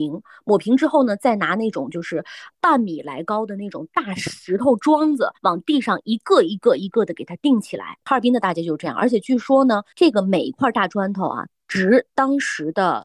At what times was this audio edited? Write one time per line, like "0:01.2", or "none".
0:05.3